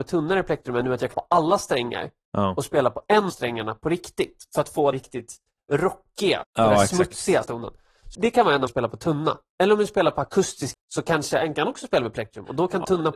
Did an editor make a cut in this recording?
yes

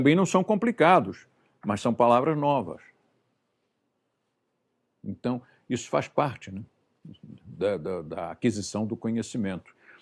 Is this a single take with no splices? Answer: yes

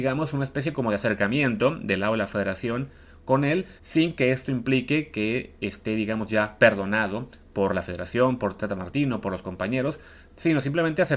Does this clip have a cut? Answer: yes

